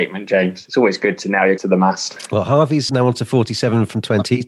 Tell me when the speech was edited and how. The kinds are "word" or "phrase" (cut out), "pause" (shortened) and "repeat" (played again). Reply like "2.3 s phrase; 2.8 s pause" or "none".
1.6 s word; 2.9 s word